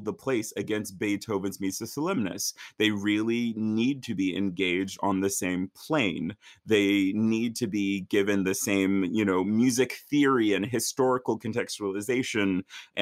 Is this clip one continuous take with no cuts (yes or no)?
yes